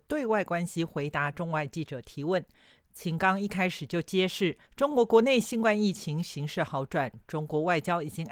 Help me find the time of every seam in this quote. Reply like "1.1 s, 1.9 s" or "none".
4.7 s